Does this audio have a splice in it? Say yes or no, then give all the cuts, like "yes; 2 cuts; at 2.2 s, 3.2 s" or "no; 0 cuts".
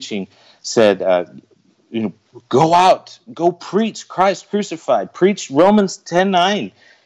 no; 0 cuts